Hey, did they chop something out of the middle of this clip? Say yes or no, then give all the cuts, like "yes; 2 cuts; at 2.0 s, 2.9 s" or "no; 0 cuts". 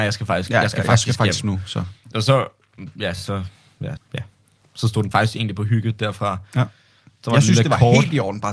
yes; 3 cuts; at 1.4 s, 4.0 s, 5.1 s